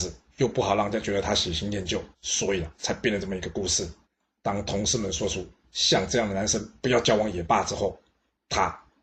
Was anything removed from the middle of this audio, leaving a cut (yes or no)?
yes